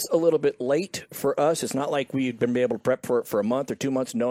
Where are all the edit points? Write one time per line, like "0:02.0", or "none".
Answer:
none

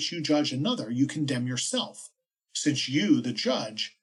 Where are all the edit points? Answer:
none

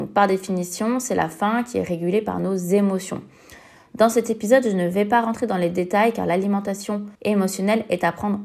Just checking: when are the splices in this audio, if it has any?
0:07.1

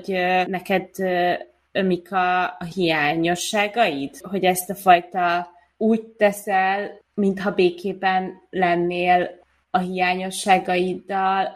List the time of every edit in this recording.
none

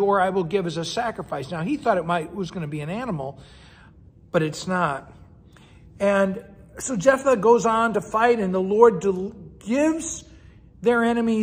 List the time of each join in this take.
none

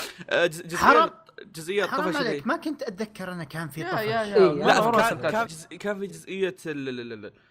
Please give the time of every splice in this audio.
0:05.5
0:06.1

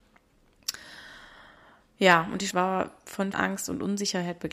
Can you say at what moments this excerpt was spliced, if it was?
0:02.5
0:03.3

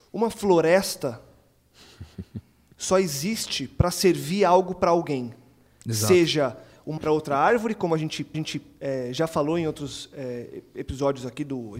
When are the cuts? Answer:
0:07.0
0:08.3

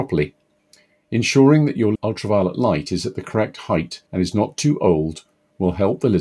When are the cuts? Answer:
0:01.9
0:04.1

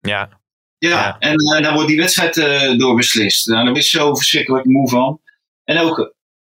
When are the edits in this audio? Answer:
0:01.6
0:03.7
0:04.6

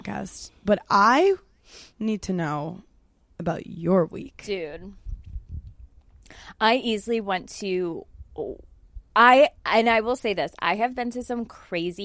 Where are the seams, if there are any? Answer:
0:08.3

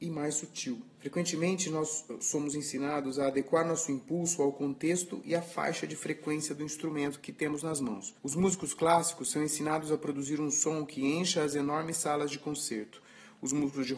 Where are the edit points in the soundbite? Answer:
0:00.9
0:08.2

